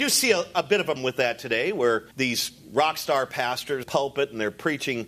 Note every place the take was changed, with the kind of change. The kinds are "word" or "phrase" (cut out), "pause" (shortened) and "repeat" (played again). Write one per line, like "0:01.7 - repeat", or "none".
0:01.0 - word
0:02.1 - pause
0:03.8 - phrase